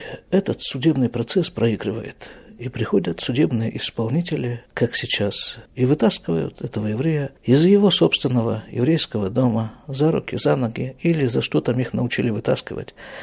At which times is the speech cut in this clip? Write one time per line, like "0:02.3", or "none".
0:04.7
0:05.7
0:07.4